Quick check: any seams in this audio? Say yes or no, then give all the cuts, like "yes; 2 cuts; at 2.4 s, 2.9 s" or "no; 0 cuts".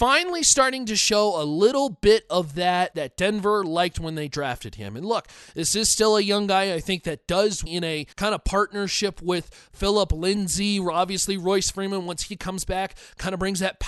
yes; 3 cuts; at 2.9 s, 7.7 s, 8.1 s